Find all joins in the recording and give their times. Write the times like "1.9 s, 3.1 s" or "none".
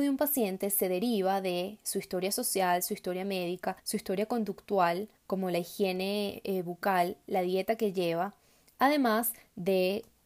3.8 s, 5.2 s